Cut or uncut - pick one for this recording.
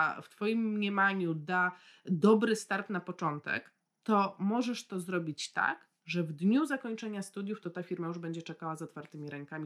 uncut